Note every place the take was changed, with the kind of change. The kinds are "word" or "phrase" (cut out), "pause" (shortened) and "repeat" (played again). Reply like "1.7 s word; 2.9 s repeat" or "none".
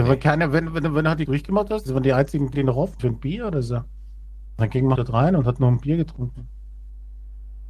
1.3 s phrase; 1.9 s phrase; 2.5 s word; 3.0 s word; 5.0 s word